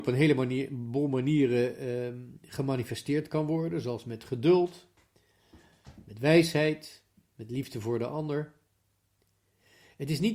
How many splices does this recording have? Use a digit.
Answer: 0